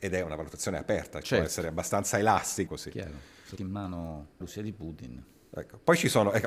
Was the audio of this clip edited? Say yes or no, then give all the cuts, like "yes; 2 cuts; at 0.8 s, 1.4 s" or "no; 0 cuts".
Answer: yes; 4 cuts; at 1.2 s, 2.7 s, 3.6 s, 4.4 s